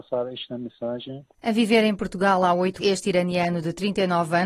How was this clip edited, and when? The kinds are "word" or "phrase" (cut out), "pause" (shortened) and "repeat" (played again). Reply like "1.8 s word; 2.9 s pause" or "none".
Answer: 2.8 s word